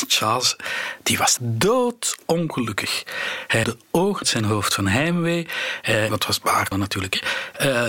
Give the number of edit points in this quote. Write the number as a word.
five